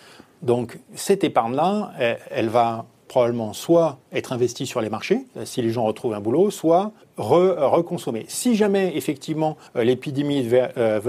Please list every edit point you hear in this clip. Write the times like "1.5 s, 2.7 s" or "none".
5.3 s, 7.0 s, 9.7 s